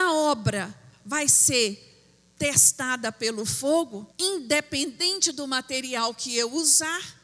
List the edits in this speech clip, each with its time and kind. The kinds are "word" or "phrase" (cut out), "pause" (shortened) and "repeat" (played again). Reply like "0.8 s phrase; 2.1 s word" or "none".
4.1 s pause